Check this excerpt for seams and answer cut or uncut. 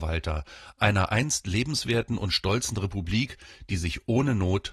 uncut